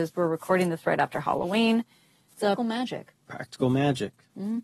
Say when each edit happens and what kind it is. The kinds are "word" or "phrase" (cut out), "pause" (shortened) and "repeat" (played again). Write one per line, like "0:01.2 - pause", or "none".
0:02.6 - word